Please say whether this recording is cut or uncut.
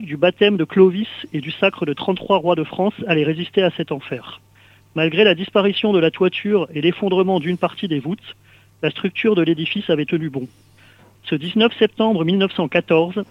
uncut